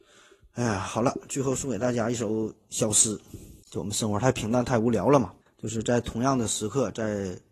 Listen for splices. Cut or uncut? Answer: cut